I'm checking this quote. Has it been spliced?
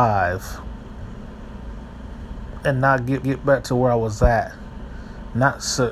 yes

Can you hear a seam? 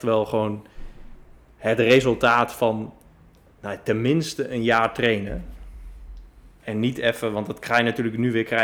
no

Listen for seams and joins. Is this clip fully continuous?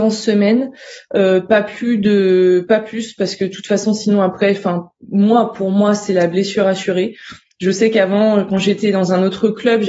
yes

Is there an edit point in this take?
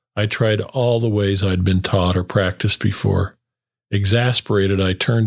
no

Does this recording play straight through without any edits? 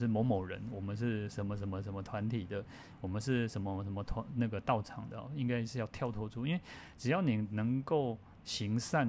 yes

